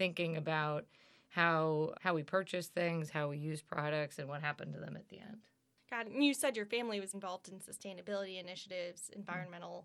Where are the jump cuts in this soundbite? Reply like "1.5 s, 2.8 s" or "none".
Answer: 1.9 s, 7.1 s